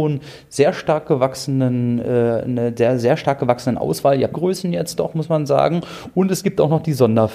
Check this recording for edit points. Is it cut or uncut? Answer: cut